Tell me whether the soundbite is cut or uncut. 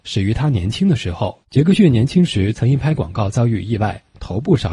cut